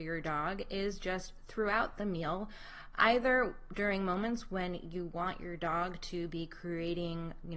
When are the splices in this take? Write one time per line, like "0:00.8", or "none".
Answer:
none